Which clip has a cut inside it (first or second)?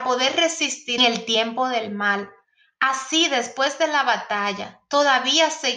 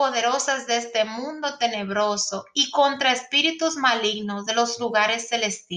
first